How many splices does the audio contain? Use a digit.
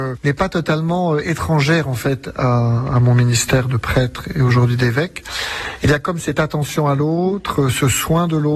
0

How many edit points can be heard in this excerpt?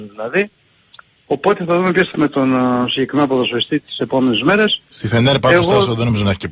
1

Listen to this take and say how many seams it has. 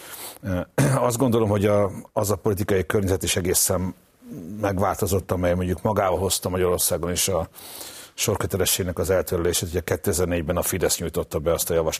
1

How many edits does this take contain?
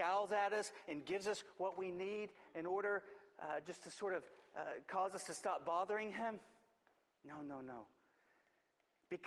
0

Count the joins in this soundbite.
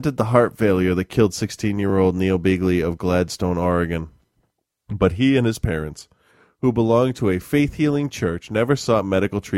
0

